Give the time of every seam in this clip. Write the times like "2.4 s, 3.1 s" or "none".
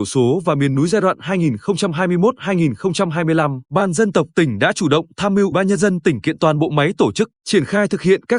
3.6 s, 5.5 s, 7.3 s